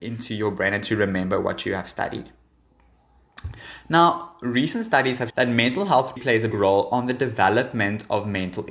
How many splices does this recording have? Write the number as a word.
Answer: three